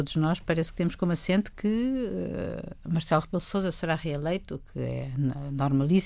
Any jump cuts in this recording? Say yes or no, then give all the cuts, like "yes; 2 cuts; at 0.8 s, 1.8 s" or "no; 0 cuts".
no; 0 cuts